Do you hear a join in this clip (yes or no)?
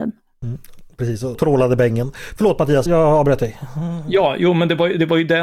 yes